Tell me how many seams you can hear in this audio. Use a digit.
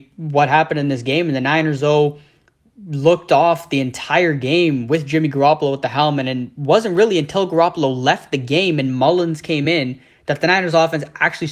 0